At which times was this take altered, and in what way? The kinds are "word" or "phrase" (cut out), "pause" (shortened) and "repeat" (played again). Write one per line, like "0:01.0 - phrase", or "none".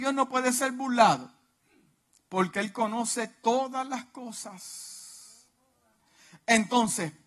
none